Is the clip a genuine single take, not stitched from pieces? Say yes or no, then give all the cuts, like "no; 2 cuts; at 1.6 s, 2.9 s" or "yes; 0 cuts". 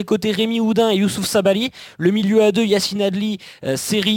yes; 0 cuts